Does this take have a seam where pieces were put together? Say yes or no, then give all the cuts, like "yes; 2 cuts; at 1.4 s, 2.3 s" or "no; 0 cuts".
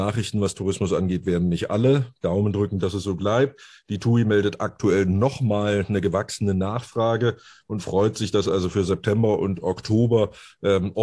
no; 0 cuts